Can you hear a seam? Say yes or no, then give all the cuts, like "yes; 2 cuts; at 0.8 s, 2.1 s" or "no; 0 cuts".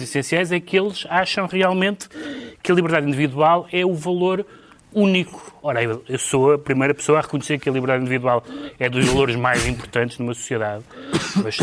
no; 0 cuts